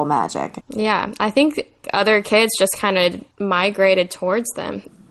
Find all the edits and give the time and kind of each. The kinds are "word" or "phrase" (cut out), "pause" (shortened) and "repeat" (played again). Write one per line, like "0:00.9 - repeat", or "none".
none